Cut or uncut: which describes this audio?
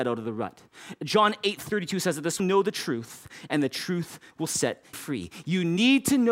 cut